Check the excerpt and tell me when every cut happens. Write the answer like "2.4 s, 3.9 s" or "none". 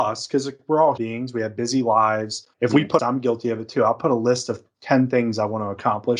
1.0 s, 2.5 s, 3.0 s